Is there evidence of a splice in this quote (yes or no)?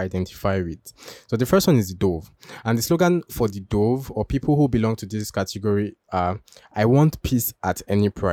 no